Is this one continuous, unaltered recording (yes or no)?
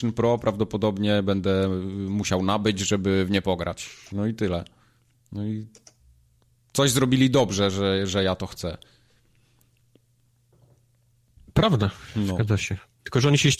yes